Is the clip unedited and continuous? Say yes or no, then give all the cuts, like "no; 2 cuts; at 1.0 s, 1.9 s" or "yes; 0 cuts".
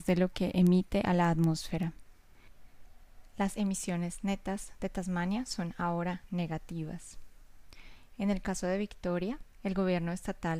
no; 1 cut; at 9.5 s